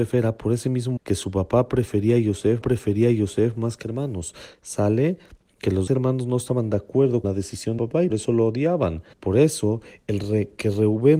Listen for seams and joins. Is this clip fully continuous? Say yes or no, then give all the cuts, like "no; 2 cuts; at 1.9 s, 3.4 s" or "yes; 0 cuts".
no; 8 cuts; at 1.0 s, 2.6 s, 3.8 s, 5.9 s, 7.2 s, 7.8 s, 8.1 s, 9.1 s